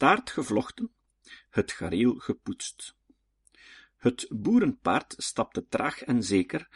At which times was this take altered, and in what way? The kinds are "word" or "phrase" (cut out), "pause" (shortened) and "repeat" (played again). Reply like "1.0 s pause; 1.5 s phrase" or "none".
none